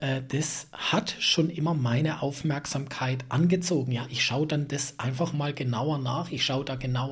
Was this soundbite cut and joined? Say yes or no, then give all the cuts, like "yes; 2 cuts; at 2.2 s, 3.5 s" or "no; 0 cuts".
no; 0 cuts